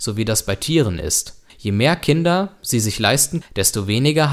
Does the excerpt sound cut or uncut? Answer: cut